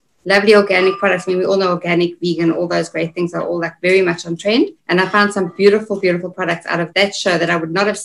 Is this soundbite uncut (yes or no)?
no